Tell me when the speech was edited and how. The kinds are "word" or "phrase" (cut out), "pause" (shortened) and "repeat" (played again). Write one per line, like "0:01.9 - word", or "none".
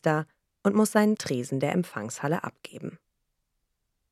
0:01.2 - phrase